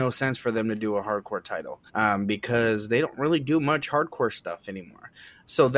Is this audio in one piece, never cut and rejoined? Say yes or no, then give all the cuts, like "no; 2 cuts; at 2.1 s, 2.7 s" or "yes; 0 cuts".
no; 1 cut; at 1.9 s